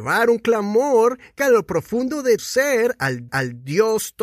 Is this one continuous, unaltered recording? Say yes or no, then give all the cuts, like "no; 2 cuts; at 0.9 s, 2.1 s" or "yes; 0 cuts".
no; 3 cuts; at 1.4 s, 2.4 s, 3.3 s